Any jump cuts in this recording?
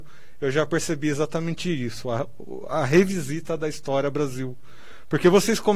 no; 0 cuts

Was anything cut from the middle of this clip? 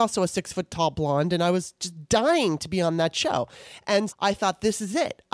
yes; 1 cut; at 4.1 s

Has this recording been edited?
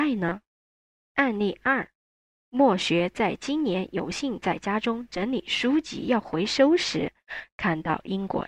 no; 0 cuts

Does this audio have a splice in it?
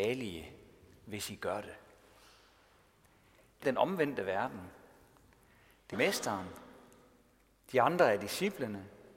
yes; 2 cuts; at 3.6 s, 5.9 s

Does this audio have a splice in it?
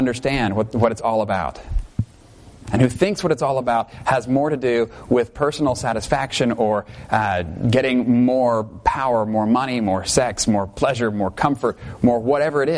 no; 0 cuts

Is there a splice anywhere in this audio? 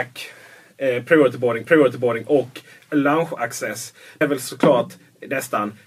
yes; 2 cuts; at 1.6 s, 4.2 s

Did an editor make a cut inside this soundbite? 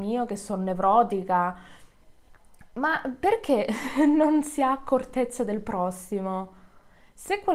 no; 0 cuts

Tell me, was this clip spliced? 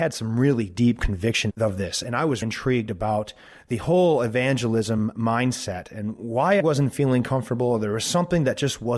yes; 2 cuts; at 2.4 s, 6.6 s

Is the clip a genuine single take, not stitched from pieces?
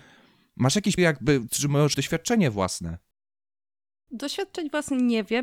no; 3 cuts; at 1.0 s, 1.5 s, 1.9 s

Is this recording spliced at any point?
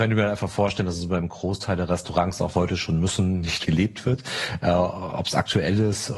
yes; 2 cuts; at 2.5 s, 3.6 s

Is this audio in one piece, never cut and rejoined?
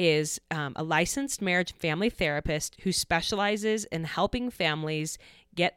yes; 0 cuts

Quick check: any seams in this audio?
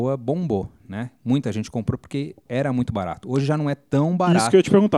yes; 1 cut; at 2.4 s

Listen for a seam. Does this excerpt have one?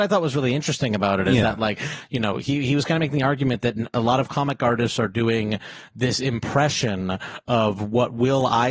no; 0 cuts

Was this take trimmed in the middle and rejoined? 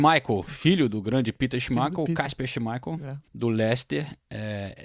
yes; 1 cut; at 3.3 s

